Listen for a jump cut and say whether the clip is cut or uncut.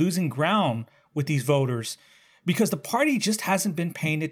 uncut